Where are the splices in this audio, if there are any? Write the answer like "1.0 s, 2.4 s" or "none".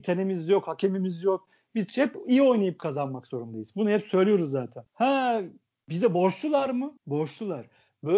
4.9 s, 7.0 s